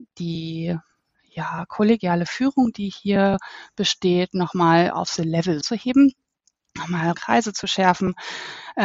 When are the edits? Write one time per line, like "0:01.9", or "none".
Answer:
0:05.2
0:05.6
0:07.1